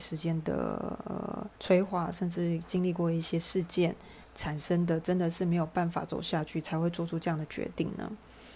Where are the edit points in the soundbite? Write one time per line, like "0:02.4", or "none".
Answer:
0:01.5